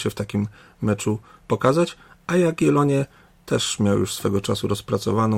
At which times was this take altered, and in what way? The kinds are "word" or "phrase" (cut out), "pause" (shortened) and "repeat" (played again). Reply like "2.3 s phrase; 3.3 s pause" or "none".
none